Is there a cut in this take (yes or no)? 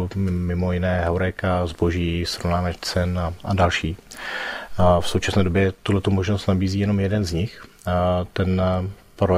no